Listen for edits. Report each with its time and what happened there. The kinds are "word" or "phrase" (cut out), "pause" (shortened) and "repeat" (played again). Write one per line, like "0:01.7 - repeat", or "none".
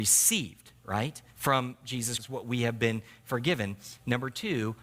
0:01.3 - pause
0:02.2 - word